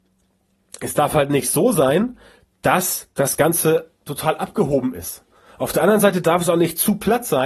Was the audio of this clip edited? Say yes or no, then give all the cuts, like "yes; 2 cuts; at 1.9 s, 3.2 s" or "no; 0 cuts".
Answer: no; 0 cuts